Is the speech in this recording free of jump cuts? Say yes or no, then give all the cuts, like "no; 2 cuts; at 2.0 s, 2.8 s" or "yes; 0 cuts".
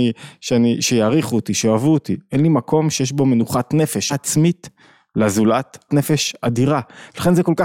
no; 2 cuts; at 4.1 s, 5.9 s